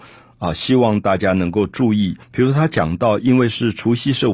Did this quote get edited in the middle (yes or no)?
yes